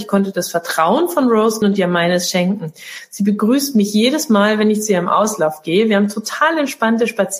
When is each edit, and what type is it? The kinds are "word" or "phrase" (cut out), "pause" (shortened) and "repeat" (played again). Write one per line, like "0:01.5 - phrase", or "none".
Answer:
0:01.6 - word